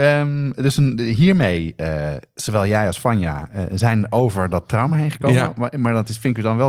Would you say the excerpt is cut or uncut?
uncut